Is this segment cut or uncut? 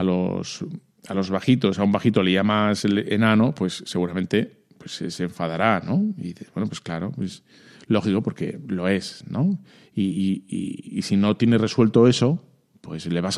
uncut